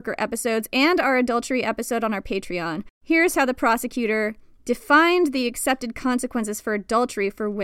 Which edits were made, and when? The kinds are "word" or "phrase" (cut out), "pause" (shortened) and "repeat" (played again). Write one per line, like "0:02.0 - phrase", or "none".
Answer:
none

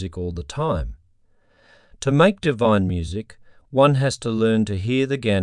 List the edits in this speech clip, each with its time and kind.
none

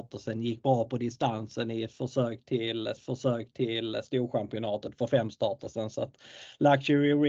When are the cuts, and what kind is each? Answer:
0:03.0 - repeat

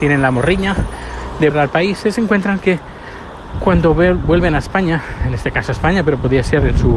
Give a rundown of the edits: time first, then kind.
0:01.5 - word

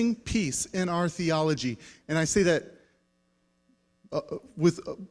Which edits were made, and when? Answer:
none

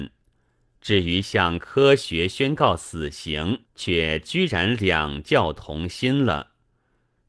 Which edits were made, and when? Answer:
0:03.7 - pause

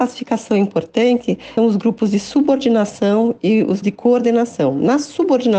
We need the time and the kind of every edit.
0:01.6 - word
0:03.8 - word

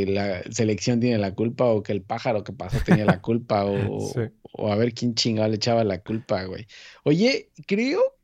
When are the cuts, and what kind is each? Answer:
none

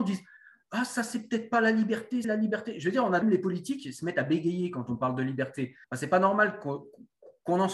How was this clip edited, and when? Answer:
0:02.2 - phrase
0:03.2 - phrase
0:05.8 - pause

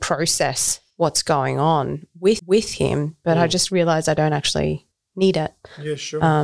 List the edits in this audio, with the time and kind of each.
0:00.9 - pause
0:02.4 - repeat
0:04.9 - pause

